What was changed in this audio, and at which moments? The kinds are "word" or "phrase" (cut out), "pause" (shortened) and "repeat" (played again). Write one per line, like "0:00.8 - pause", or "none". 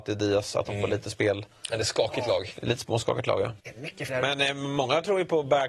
0:03.6 - pause
0:04.1 - word